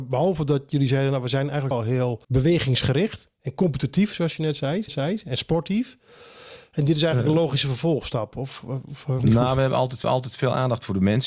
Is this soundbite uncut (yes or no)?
no